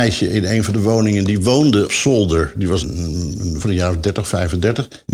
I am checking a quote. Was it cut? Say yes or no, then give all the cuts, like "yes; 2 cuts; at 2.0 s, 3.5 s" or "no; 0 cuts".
yes; 3 cuts; at 1.9 s, 2.8 s, 3.6 s